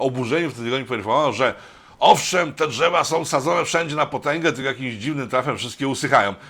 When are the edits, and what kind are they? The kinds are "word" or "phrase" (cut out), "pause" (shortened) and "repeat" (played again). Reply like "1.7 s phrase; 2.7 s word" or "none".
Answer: none